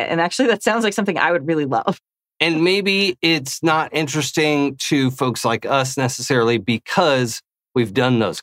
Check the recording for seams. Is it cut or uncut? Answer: uncut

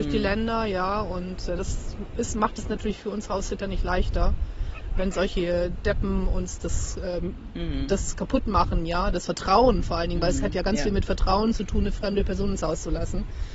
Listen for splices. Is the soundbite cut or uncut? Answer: uncut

